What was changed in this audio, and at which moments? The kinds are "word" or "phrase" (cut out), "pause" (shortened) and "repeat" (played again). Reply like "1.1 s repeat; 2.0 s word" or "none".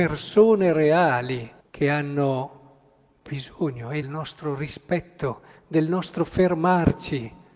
1.6 s pause; 4.0 s phrase

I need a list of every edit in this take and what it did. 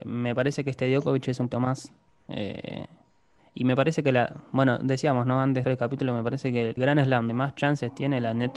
1.5 s word; 5.6 s word; 6.8 s word; 7.3 s word

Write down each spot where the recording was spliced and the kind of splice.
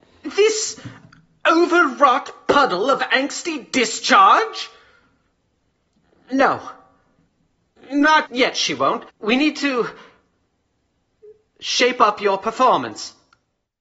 8.3 s word; 9.1 s pause

